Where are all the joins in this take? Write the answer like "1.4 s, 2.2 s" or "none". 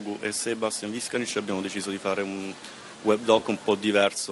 none

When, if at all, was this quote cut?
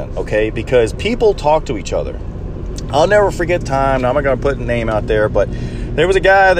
3.6 s

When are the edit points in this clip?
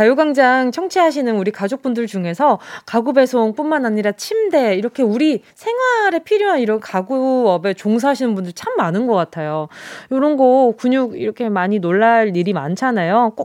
5.5 s

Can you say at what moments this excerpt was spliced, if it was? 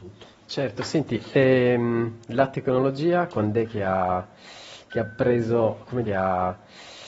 6.1 s

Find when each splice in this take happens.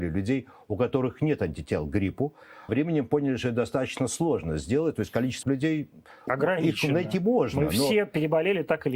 2.7 s, 5.4 s, 6.3 s

